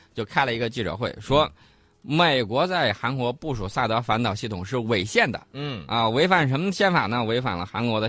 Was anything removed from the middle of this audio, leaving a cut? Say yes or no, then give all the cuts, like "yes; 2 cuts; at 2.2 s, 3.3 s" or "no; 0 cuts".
no; 0 cuts